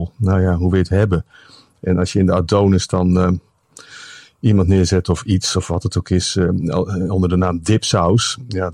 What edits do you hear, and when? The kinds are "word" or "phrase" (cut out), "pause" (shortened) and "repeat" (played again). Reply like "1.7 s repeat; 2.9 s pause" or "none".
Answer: none